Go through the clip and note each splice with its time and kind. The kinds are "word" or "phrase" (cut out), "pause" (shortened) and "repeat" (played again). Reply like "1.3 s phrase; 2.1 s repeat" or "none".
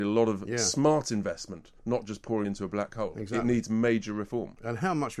1.8 s pause; 2.4 s word